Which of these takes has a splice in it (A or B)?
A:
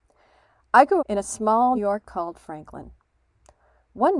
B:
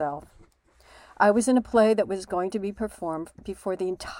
A